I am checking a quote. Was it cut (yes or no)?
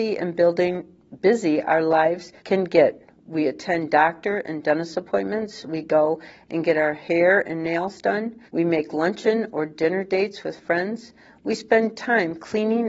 yes